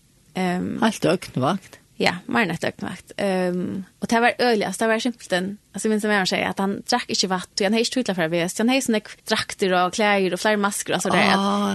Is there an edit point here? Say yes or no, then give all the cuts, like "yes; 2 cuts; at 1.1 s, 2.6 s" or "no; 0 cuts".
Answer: yes; 3 cuts; at 3.9 s, 5.6 s, 9.2 s